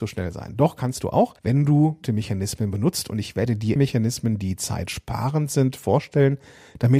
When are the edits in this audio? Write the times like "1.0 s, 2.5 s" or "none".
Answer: 1.4 s, 2.0 s, 3.8 s